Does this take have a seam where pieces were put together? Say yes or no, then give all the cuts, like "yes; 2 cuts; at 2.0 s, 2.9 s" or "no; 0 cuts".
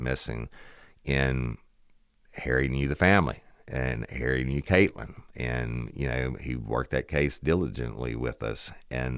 no; 0 cuts